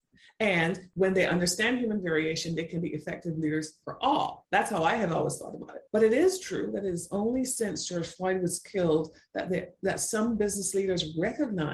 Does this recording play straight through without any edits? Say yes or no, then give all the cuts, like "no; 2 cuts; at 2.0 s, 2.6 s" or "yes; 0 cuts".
no; 1 cut; at 5.9 s